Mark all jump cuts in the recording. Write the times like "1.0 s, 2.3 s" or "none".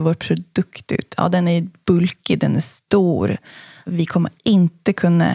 none